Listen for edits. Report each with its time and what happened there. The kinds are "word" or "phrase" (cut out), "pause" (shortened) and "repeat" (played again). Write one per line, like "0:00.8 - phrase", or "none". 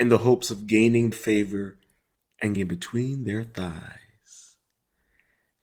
0:01.1 - word
0:02.6 - word